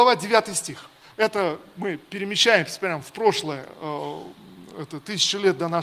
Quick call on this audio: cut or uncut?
cut